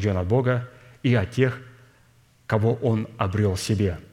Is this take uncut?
yes; 0 cuts

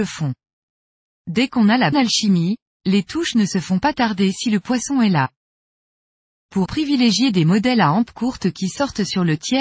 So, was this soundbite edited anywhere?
yes; 2 cuts; at 1.9 s, 6.7 s

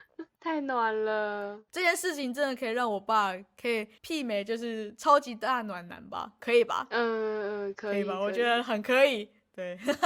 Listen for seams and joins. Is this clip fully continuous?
no; 1 cut; at 4.0 s

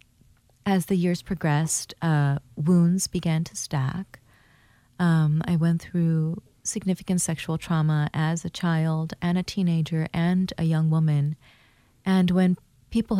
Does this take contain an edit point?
no; 0 cuts

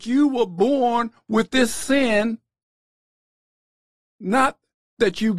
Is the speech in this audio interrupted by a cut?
no; 0 cuts

